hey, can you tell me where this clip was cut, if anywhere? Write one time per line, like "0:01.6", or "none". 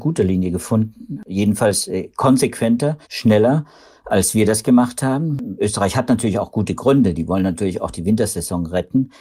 0:03.0